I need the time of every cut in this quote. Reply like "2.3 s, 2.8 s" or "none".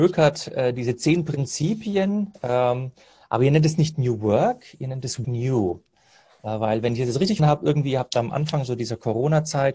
5.2 s, 7.4 s

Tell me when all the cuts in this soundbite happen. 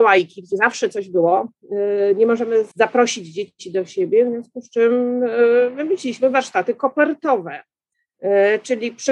2.7 s

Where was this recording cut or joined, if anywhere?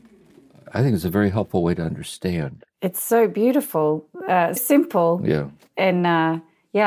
4.6 s

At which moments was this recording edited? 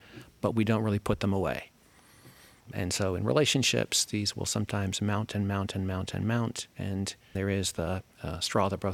7.3 s

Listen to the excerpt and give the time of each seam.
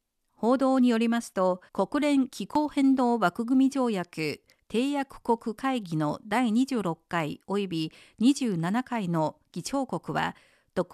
1.7 s

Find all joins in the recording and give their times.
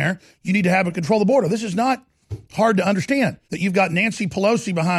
0.9 s, 3.4 s

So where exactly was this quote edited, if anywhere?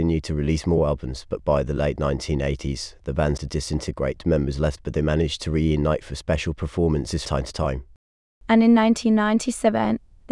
3.4 s, 4.8 s, 7.3 s

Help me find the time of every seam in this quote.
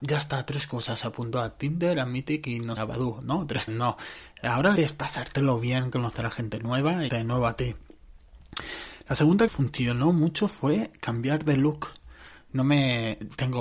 2.8 s, 3.7 s, 4.8 s, 7.1 s, 9.5 s

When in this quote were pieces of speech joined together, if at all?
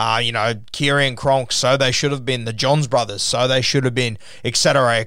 none

